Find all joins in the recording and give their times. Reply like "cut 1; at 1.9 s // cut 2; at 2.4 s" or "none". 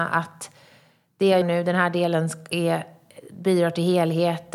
cut 1; at 1.4 s